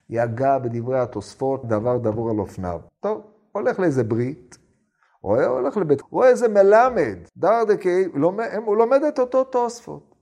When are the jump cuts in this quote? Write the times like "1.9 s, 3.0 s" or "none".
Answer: 1.6 s, 2.9 s, 6.0 s, 7.3 s